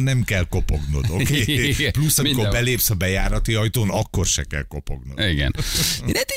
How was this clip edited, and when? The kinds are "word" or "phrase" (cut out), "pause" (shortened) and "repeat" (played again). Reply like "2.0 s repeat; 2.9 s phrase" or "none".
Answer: none